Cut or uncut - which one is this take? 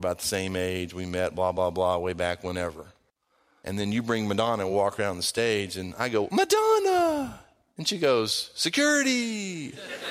uncut